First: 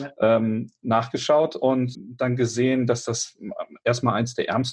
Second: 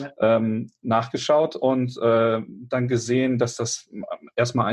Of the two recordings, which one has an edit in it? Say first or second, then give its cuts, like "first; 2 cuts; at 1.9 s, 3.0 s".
first; 1 cut; at 1.9 s